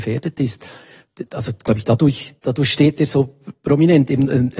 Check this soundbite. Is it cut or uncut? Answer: cut